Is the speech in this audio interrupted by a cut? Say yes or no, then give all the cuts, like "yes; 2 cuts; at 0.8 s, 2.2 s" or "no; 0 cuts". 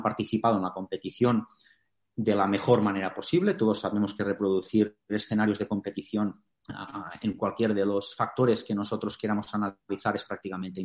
no; 0 cuts